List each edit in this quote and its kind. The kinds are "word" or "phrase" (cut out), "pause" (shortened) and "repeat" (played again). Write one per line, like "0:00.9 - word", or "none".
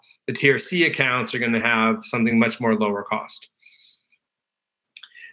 none